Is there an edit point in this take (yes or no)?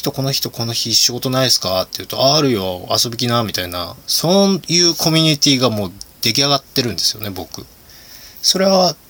yes